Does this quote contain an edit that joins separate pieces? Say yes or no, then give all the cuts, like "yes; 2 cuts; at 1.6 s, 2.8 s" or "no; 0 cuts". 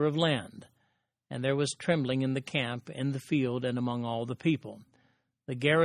no; 0 cuts